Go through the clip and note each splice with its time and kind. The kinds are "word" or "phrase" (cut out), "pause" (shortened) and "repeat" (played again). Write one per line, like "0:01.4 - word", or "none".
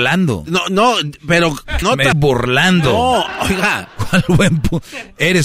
0:01.8 - phrase
0:02.1 - word